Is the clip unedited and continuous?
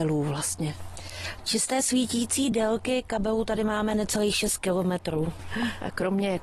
yes; 0 cuts

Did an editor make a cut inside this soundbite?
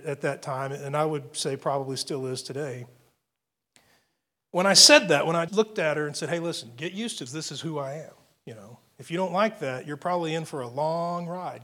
yes; 2 cuts; at 5.5 s, 7.3 s

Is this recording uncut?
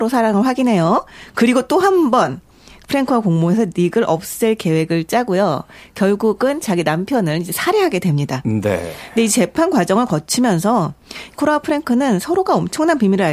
yes; 0 cuts

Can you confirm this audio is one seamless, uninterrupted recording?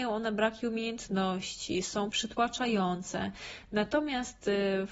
no; 1 cut; at 2.1 s

